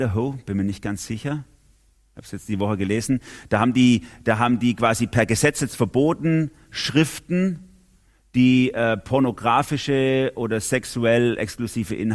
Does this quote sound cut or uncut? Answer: uncut